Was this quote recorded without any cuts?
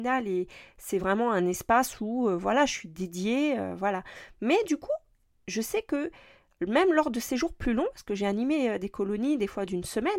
yes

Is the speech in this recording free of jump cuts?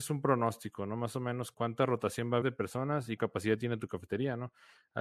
no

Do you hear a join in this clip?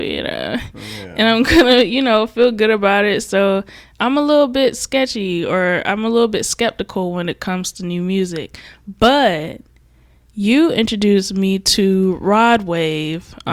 no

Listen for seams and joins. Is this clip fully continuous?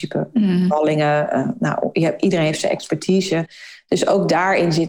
yes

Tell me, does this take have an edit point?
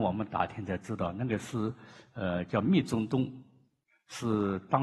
no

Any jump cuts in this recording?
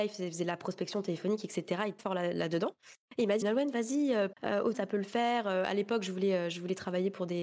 yes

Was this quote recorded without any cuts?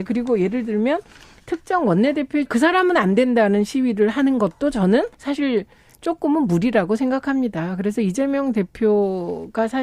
no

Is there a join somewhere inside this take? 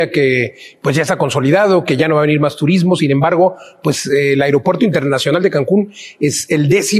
no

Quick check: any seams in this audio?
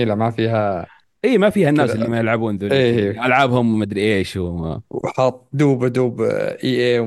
no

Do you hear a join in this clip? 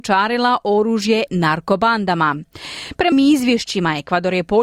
yes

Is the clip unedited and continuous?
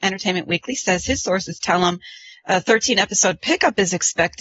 no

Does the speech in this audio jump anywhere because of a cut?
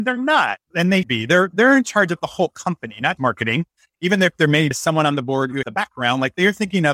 yes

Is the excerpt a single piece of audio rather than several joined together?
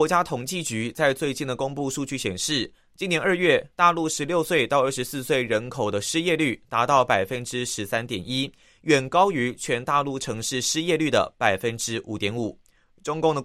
yes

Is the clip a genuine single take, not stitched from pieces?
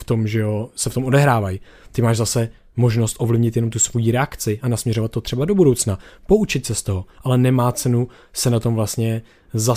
yes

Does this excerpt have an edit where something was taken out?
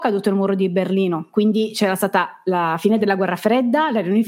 no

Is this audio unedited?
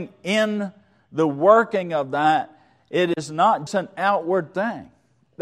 no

